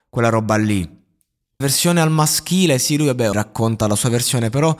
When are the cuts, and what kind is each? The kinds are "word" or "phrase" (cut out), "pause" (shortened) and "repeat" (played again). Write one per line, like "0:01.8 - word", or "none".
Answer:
0:01.6 - word
0:03.3 - word